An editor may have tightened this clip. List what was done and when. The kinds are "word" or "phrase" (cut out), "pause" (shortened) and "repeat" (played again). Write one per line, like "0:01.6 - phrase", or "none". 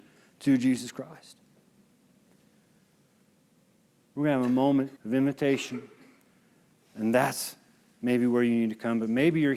0:05.0 - pause